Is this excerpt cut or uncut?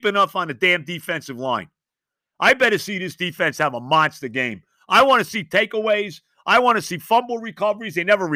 uncut